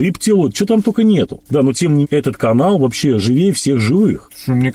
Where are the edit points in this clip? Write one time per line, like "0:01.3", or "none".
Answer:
0:02.0